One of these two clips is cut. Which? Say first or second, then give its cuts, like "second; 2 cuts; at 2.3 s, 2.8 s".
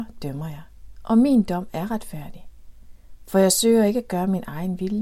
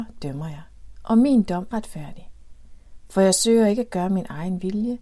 second; 1 cut; at 1.7 s